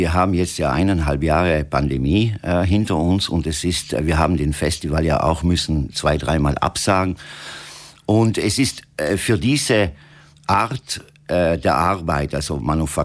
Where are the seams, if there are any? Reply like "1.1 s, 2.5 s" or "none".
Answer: none